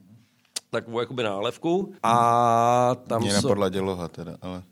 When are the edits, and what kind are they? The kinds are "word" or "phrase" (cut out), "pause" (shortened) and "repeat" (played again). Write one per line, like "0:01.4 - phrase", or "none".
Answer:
0:02.0 - pause